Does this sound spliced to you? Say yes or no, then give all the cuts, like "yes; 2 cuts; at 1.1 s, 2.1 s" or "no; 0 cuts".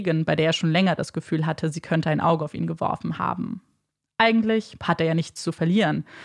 no; 0 cuts